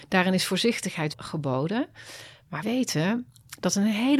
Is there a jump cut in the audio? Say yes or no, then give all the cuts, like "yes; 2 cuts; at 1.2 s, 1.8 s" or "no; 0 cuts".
yes; 2 cuts; at 1.1 s, 2.6 s